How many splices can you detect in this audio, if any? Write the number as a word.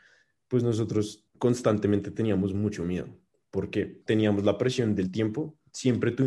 two